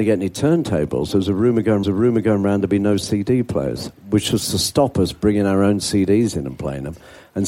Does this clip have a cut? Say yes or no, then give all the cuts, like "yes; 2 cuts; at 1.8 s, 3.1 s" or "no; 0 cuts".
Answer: yes; 1 cut; at 1.8 s